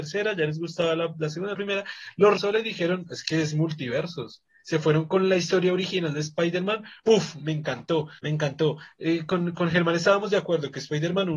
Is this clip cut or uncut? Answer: cut